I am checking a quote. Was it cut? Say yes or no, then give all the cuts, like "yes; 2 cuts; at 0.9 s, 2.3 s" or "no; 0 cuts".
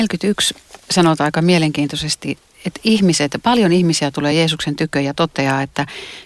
no; 0 cuts